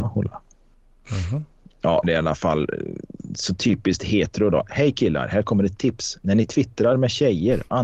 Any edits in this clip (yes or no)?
yes